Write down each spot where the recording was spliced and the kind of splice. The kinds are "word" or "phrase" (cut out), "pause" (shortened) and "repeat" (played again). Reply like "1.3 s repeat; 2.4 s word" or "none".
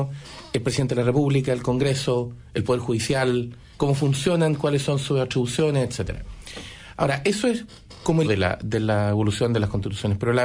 3.7 s pause; 8.2 s word